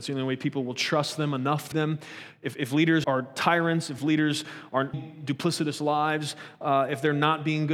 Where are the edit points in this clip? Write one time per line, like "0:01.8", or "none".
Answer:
0:01.7
0:03.0
0:04.0
0:04.9